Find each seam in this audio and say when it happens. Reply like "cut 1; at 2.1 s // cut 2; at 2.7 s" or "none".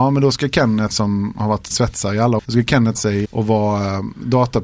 cut 1; at 0.9 s // cut 2; at 1.7 s // cut 3; at 2.4 s // cut 4; at 2.9 s // cut 5; at 3.2 s